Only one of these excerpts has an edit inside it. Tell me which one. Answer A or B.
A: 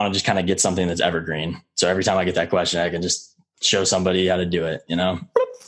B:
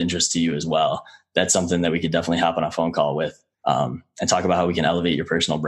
B